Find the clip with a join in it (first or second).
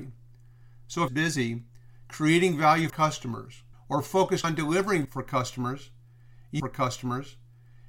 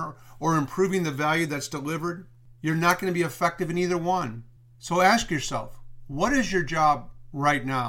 first